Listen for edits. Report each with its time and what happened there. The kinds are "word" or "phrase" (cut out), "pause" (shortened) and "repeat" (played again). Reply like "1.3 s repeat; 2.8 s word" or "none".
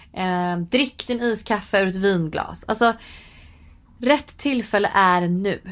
none

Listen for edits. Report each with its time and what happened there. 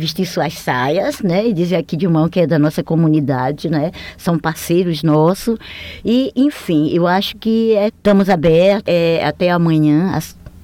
7.9 s word; 8.9 s word

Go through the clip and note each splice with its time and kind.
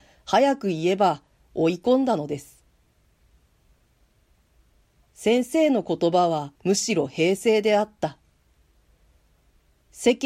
6.6 s pause

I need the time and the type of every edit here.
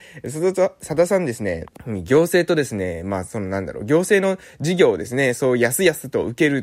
1.7 s pause

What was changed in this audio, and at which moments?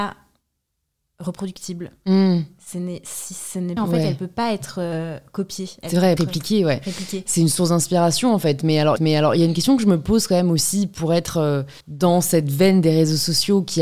3.8 s phrase; 6.2 s phrase; 9.0 s repeat; 11.8 s pause

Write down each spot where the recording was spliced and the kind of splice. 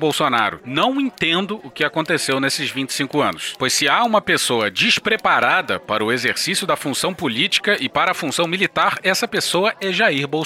none

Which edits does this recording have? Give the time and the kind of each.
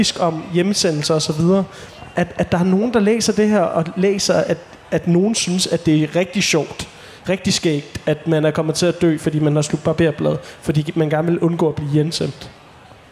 none

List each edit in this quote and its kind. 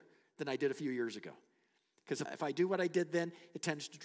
2.3 s word

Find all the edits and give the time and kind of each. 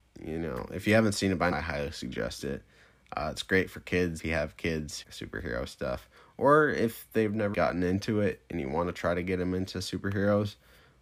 1.5 s word; 4.2 s word; 5.0 s word; 7.5 s word

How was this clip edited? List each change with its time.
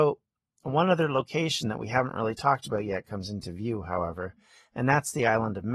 none

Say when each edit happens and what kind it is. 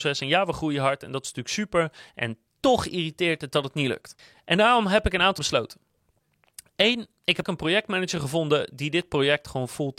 2.5 s word; 5.4 s word; 7.4 s word

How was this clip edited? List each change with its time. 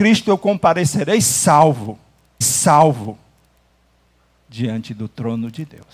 2.4 s repeat

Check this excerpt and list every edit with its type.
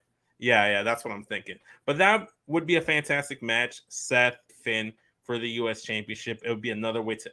4.5 s word

